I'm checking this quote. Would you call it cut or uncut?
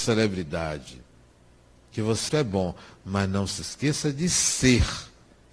cut